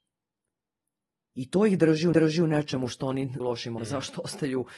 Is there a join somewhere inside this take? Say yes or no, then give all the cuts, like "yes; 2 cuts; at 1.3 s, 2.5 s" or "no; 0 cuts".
yes; 3 cuts; at 2.1 s, 3.4 s, 3.8 s